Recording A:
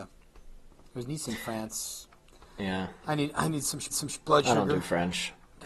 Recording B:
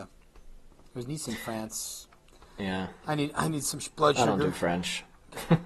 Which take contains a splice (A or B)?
A